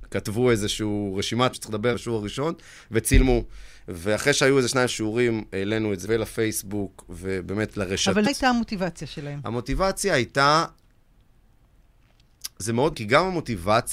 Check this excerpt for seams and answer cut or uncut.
cut